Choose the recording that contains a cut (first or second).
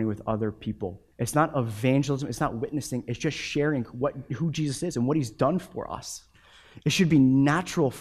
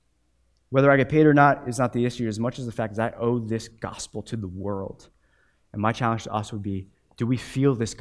first